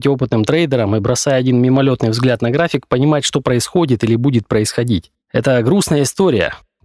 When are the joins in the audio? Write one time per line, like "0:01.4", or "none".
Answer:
0:05.2